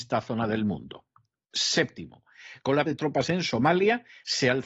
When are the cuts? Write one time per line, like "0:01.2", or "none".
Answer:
0:02.9
0:03.3